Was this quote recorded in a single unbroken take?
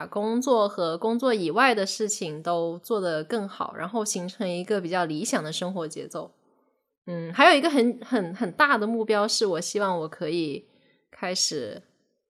yes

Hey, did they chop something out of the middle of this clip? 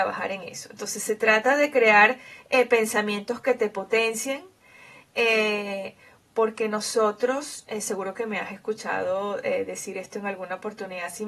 no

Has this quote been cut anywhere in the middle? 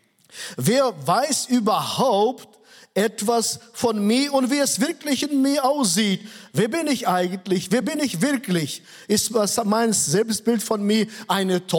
no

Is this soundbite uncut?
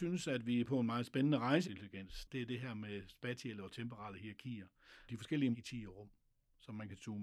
no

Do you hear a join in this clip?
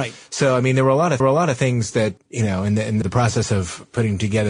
yes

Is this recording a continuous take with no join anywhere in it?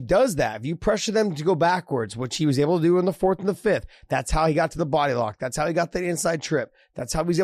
yes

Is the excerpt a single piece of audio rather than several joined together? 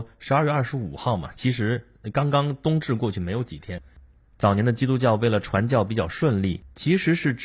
yes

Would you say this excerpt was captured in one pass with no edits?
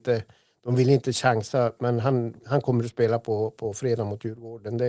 yes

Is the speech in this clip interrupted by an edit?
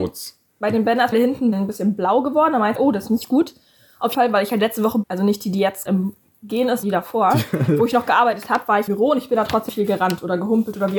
yes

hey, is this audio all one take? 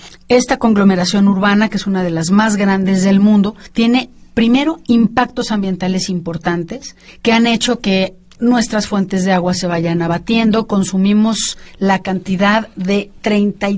yes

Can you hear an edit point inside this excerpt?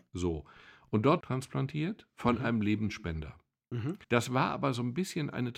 yes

